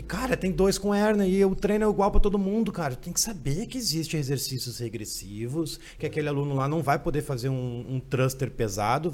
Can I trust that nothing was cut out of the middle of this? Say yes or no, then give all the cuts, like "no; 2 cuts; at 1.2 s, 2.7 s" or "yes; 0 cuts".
yes; 0 cuts